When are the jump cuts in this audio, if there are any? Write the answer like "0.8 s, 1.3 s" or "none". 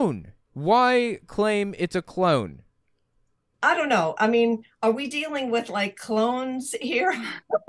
none

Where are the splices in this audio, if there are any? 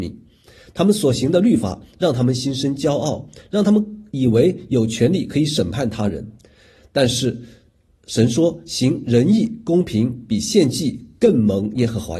none

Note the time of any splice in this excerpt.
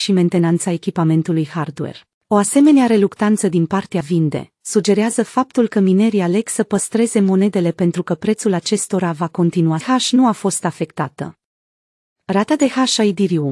2.1 s, 4.0 s, 9.8 s

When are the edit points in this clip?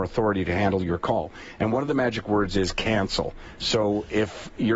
none

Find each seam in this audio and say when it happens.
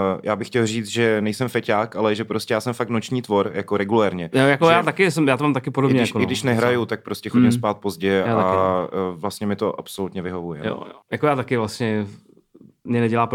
11.0 s

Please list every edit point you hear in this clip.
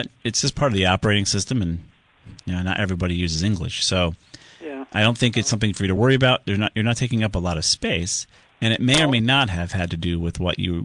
none

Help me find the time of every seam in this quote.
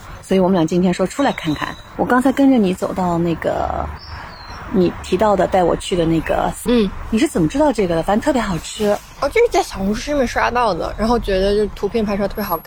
6.7 s

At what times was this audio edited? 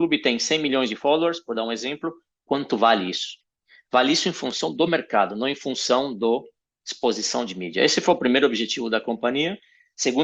none

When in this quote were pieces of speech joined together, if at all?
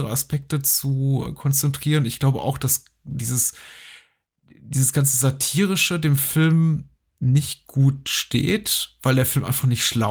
1.3 s

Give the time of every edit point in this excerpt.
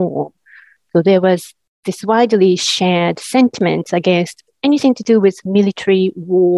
none

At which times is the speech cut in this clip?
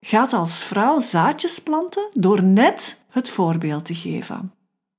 none

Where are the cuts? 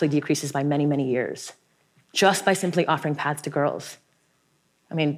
none

